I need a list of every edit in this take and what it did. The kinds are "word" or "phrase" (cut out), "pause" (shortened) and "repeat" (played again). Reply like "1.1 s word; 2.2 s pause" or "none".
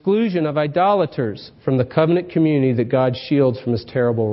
none